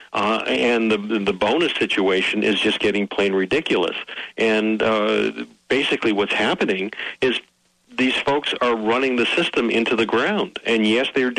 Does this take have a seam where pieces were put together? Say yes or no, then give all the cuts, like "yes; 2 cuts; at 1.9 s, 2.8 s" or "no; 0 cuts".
no; 0 cuts